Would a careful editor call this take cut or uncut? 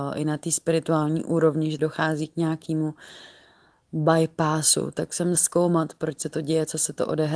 cut